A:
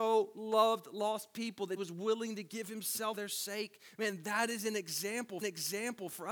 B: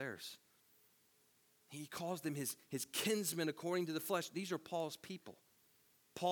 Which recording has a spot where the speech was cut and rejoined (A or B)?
A